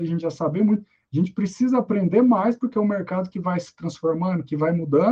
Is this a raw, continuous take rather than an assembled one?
yes; 0 cuts

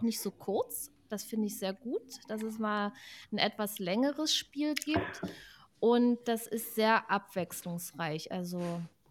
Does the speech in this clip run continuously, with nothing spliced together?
yes; 0 cuts

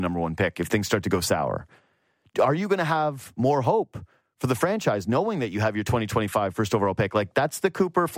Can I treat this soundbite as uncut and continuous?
yes; 0 cuts

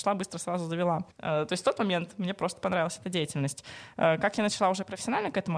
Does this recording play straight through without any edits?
no; 1 cut; at 1.1 s

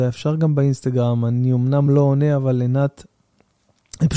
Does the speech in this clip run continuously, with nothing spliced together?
yes; 0 cuts

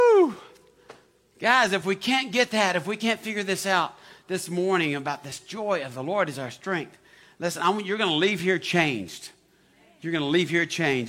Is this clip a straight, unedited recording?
yes; 0 cuts

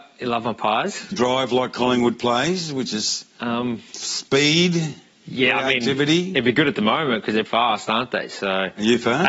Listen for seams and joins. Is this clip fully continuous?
no; 2 cuts; at 1.1 s, 7.5 s

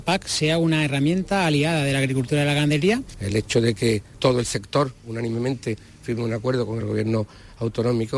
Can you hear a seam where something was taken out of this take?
no; 0 cuts

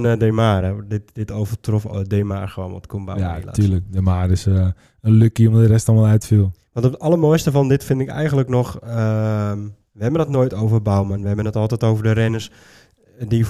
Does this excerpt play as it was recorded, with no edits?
yes; 0 cuts

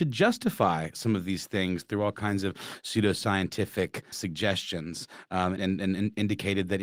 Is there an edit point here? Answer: yes; 2 cuts; at 4.1 s, 5.6 s

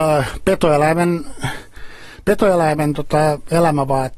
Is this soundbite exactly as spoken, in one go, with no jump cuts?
yes; 0 cuts

